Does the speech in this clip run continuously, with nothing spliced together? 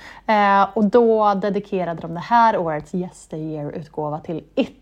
yes; 0 cuts

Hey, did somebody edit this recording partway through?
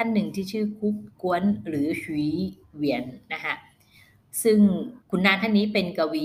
yes; 3 cuts; at 1.1 s, 2.6 s, 5.0 s

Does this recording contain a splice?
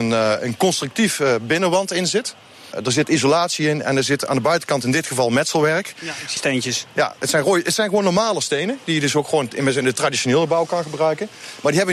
yes; 1 cut; at 6.4 s

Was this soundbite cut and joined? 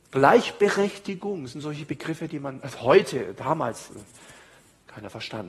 no; 0 cuts

